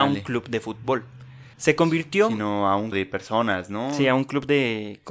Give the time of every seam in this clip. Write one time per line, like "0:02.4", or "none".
0:01.5
0:02.9